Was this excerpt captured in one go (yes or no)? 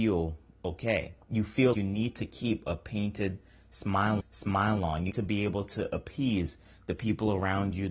no